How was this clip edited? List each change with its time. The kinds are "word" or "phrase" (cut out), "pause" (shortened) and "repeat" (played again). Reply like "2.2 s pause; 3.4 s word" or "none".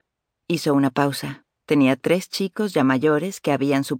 1.5 s pause